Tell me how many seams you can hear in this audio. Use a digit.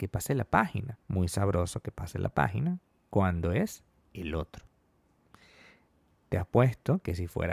1